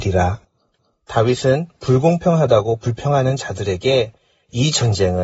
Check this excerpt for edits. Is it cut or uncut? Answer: uncut